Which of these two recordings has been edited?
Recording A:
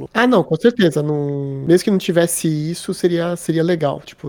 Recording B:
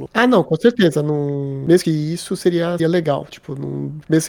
B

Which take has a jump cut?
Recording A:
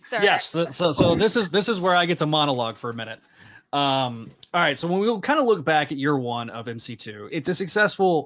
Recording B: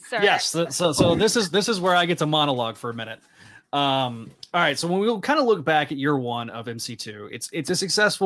A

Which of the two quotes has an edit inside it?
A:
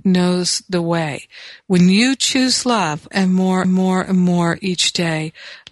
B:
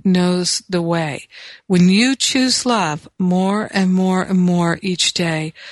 A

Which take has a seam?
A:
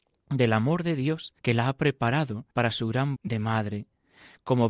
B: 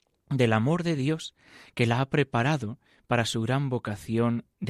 A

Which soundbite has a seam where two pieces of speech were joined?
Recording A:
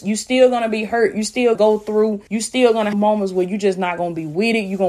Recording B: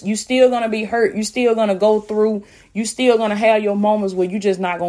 A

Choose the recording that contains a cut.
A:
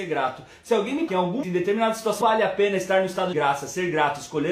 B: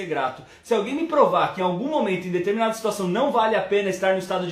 A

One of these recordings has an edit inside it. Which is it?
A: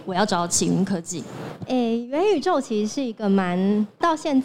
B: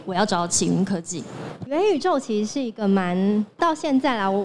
B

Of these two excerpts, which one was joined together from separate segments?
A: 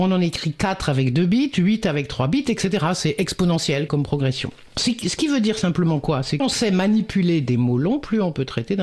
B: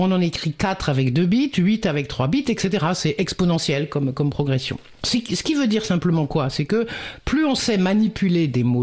A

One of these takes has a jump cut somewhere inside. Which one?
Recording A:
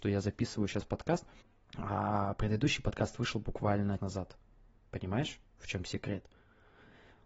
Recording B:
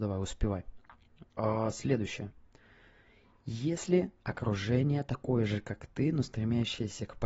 A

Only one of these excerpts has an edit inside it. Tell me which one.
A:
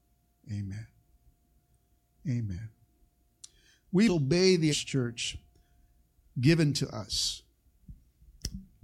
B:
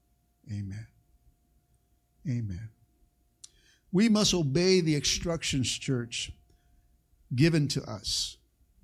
A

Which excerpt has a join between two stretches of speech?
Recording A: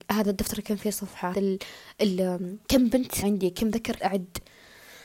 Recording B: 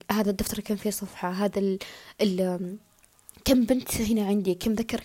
A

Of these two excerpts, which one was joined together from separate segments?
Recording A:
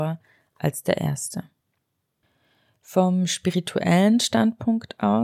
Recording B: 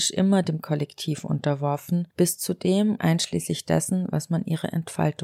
B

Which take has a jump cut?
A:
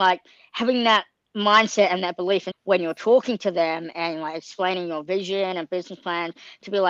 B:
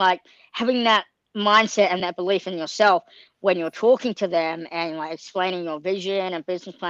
A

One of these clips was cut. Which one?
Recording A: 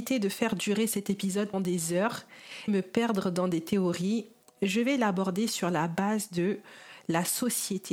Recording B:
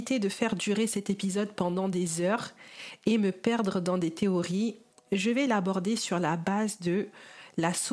A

